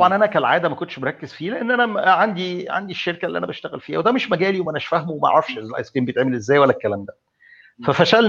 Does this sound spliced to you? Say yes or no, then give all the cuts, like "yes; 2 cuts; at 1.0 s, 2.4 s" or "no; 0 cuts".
no; 0 cuts